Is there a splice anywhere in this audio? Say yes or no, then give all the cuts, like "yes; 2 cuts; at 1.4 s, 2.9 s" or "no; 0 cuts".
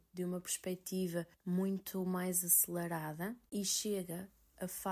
yes; 2 cuts; at 1.3 s, 3.5 s